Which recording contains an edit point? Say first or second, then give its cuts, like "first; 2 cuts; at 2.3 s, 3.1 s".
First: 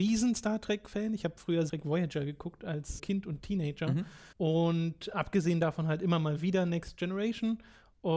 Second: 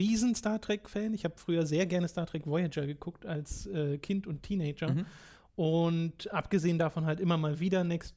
first; 3 cuts; at 1.7 s, 3.0 s, 4.3 s